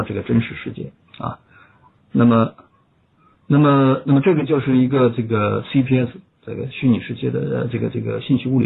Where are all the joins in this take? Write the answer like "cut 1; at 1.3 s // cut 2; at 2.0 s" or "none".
none